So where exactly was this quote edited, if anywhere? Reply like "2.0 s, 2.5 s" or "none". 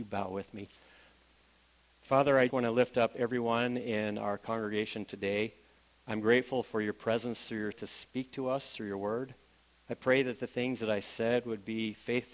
2.5 s, 7.7 s